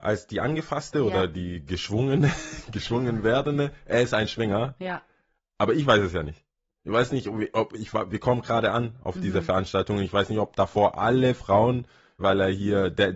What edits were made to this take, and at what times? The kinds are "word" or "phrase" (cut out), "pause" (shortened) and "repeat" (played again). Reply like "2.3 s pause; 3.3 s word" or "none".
12.2 s word